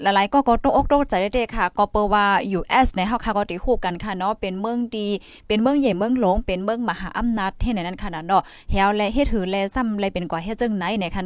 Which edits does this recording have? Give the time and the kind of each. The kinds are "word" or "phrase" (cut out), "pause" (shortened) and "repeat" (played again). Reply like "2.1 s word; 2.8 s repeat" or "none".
none